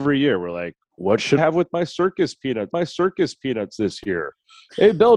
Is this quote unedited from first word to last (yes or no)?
no